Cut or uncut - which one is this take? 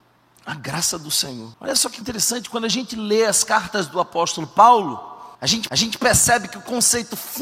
cut